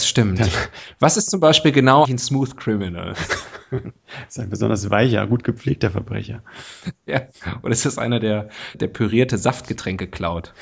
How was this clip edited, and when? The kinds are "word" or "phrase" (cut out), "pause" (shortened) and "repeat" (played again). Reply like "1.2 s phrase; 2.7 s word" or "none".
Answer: 2.0 s word; 8.7 s word

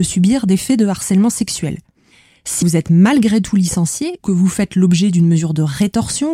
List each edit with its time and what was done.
2.6 s word; 4.2 s word

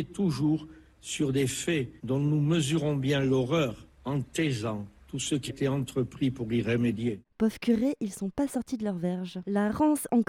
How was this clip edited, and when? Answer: 2.0 s pause; 4.9 s pause; 5.5 s word

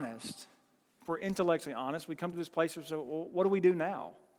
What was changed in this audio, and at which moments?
none

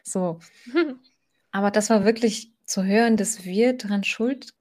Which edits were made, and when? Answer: none

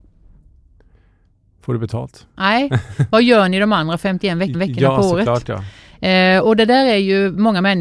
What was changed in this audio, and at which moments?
4.5 s repeat; 6.4 s word

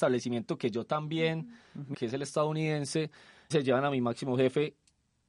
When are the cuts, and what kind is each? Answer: 1.9 s word; 3.5 s word

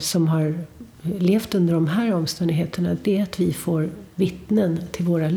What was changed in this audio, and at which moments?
none

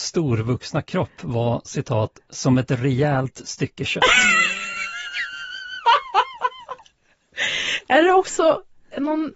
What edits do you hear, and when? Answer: none

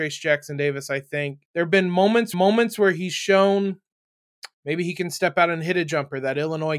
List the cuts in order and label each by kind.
1.4 s pause; 2.3 s repeat; 4.5 s pause

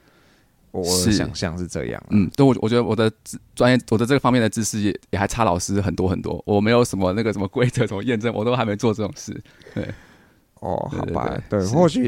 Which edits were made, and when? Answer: none

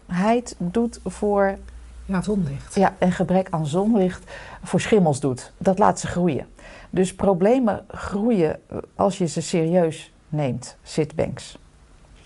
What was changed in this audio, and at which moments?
2.2 s phrase; 3.0 s word; 5.6 s pause; 9.0 s word; 10.8 s word

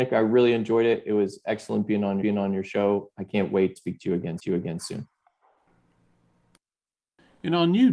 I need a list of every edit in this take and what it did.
2.2 s repeat; 3.8 s word; 4.4 s repeat

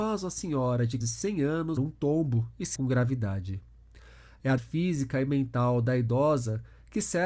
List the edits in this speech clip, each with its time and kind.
1.0 s word; 1.8 s word; 2.8 s word; 4.6 s word

